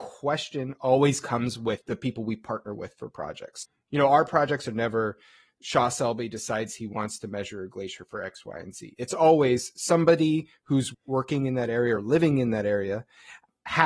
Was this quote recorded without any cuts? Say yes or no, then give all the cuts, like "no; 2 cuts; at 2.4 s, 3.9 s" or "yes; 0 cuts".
yes; 0 cuts